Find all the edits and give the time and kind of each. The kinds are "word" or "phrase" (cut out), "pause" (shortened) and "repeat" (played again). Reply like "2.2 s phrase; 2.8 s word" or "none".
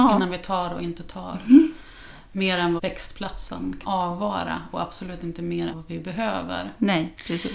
2.8 s phrase; 3.8 s word; 5.7 s word